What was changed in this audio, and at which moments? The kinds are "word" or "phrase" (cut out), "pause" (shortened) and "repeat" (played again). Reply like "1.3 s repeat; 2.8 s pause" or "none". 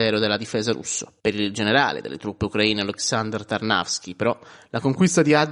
none